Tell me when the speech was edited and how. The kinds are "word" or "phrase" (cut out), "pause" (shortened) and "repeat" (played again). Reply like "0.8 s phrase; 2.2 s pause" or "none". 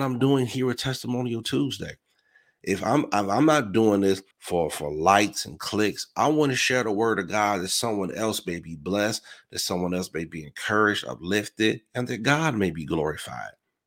4.3 s pause